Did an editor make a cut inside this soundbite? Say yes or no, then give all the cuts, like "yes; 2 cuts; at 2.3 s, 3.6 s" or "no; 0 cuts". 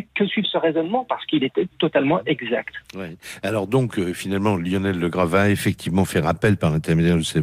yes; 1 cut; at 2.8 s